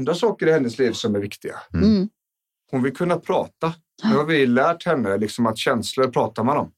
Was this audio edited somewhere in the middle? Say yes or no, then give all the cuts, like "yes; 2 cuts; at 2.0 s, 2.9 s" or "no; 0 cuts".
no; 0 cuts